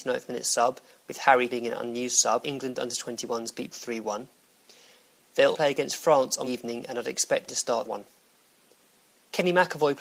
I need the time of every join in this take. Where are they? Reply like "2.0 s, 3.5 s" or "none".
1.5 s, 2.4 s, 3.7 s, 5.5 s, 6.4 s, 7.5 s, 7.8 s